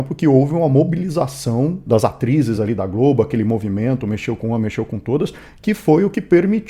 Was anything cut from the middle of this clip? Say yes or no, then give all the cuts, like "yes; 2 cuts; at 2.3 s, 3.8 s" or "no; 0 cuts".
no; 0 cuts